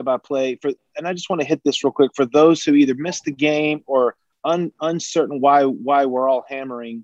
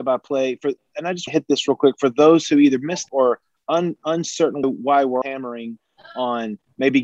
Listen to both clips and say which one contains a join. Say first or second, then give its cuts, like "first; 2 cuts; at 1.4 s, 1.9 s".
second; 4 cuts; at 1.3 s, 3.1 s, 4.6 s, 5.2 s